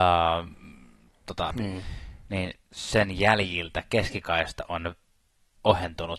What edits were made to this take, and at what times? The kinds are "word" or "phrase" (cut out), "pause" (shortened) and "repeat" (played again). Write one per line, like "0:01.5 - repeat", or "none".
0:01.5 - word